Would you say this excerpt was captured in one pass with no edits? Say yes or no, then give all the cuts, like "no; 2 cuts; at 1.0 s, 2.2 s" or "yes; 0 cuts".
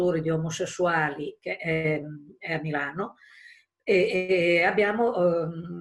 yes; 0 cuts